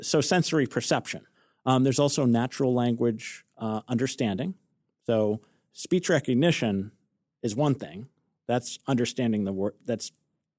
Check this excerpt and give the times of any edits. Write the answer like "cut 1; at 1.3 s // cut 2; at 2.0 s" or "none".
none